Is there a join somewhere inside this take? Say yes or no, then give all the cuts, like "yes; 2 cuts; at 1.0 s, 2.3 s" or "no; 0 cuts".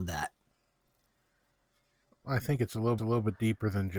yes; 1 cut; at 3.0 s